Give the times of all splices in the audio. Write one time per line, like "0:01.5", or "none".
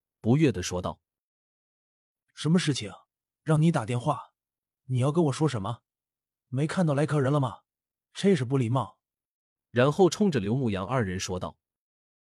none